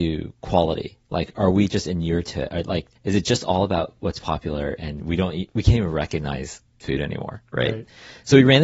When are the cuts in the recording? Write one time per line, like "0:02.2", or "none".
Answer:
0:02.9
0:06.8